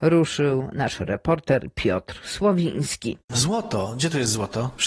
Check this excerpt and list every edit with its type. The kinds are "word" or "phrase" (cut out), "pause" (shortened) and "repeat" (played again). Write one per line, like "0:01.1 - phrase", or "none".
none